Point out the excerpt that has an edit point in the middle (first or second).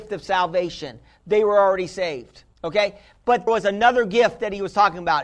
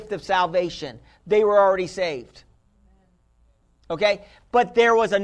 first